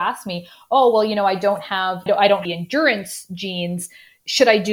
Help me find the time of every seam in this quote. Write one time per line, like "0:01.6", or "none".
0:02.1
0:02.5